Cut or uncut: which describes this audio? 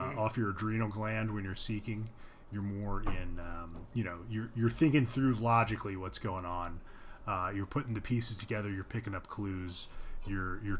uncut